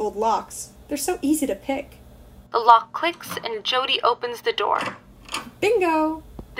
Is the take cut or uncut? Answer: cut